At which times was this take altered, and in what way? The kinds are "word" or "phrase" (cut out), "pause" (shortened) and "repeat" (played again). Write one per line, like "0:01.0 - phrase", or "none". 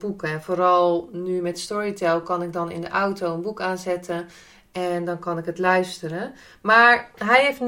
none